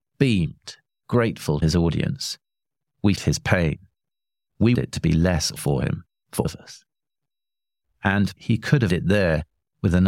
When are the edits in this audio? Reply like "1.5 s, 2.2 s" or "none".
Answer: 1.6 s, 3.2 s, 4.7 s, 5.6 s, 6.4 s, 8.4 s, 8.9 s